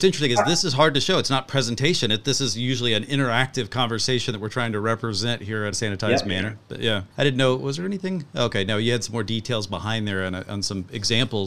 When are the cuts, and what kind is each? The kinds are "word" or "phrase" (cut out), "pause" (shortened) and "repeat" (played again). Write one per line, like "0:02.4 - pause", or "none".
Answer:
0:05.7 - phrase
0:07.1 - pause